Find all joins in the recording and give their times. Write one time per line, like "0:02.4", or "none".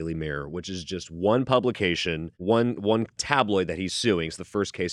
0:02.3
0:03.2